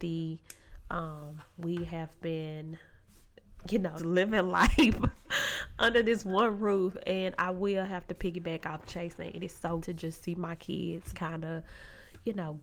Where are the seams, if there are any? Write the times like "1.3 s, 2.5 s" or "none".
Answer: 4.0 s, 9.8 s, 11.1 s